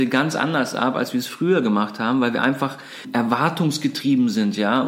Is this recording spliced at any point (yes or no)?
no